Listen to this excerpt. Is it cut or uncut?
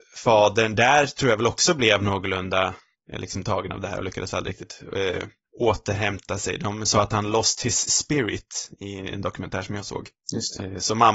uncut